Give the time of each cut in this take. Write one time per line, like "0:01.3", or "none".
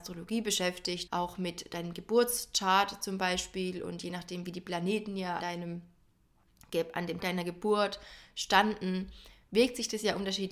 0:01.1
0:05.4
0:07.2